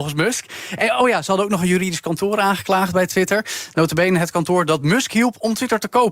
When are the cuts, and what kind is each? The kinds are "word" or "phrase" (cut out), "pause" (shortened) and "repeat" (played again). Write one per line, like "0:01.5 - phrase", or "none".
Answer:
none